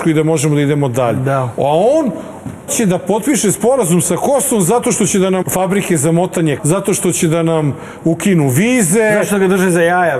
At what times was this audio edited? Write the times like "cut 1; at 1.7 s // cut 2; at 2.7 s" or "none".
cut 1; at 2.7 s // cut 2; at 5.4 s // cut 3; at 6.6 s